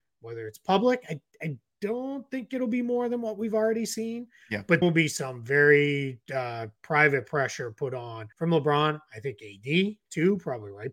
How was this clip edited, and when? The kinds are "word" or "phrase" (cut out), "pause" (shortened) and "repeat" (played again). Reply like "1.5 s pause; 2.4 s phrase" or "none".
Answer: 4.8 s word; 6.2 s pause; 8.3 s pause